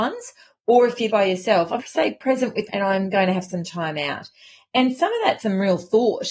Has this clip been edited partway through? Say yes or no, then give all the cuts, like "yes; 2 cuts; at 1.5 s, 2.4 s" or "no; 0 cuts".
yes; 4 cuts; at 1.1 s, 1.8 s, 2.7 s, 5.4 s